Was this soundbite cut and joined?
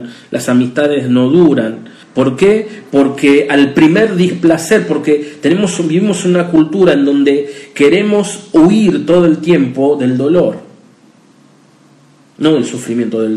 yes; 1 cut; at 2.0 s

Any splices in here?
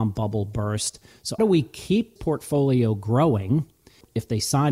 yes; 2 cuts; at 1.4 s, 2.2 s

